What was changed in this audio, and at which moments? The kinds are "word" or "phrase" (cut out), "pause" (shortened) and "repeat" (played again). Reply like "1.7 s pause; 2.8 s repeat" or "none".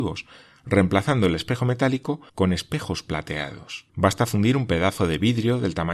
2.3 s pause; 3.9 s pause